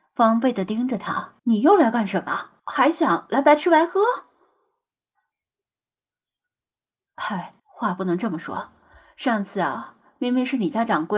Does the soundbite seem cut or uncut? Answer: cut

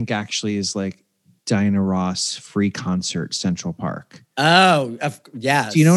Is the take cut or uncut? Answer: uncut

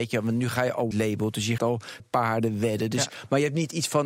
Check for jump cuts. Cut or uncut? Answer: cut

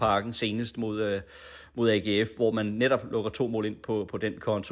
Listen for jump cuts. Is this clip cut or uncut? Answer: uncut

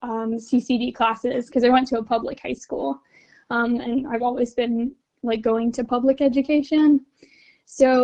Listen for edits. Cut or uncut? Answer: uncut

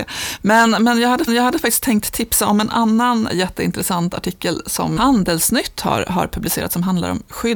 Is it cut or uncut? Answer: cut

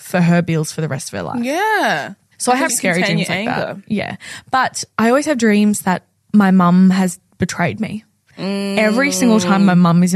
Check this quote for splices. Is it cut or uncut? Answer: cut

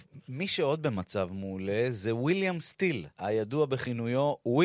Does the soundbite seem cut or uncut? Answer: cut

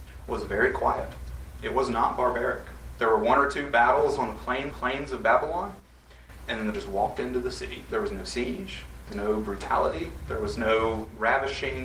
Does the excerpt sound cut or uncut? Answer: cut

